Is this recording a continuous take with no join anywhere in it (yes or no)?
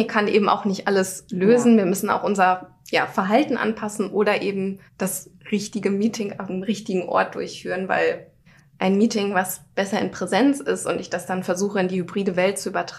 no